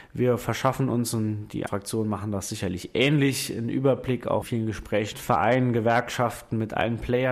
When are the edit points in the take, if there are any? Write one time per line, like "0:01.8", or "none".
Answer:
0:01.7
0:04.4
0:05.1